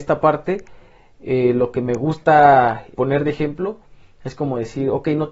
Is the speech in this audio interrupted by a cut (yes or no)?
yes